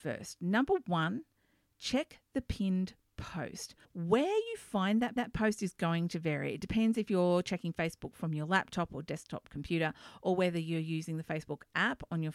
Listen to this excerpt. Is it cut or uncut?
cut